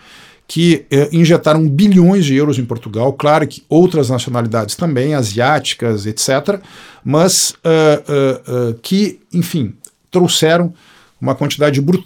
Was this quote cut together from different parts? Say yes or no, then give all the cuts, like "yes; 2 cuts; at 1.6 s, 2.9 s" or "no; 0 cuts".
no; 0 cuts